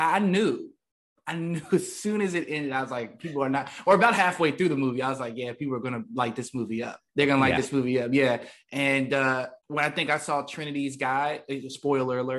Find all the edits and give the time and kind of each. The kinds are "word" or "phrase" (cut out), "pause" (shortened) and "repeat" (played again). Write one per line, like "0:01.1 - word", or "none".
0:07.1 - pause
0:09.6 - pause